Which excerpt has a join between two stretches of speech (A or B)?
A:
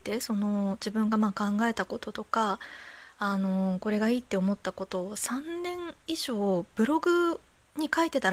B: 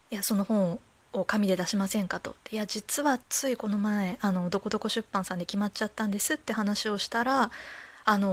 B